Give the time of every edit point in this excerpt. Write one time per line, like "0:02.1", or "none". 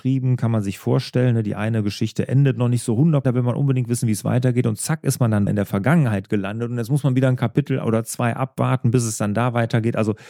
0:03.2
0:05.5